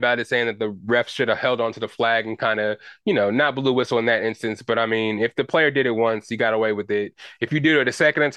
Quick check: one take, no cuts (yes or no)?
yes